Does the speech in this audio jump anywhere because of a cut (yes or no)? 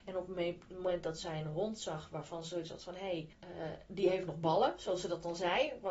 yes